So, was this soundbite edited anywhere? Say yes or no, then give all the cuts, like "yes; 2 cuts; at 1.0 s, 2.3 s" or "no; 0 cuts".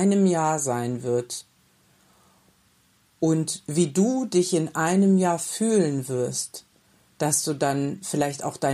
no; 0 cuts